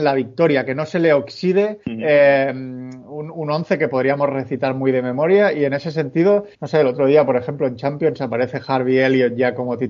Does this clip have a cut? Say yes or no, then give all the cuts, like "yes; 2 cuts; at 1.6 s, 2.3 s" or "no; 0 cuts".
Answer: yes; 2 cuts; at 1.8 s, 6.5 s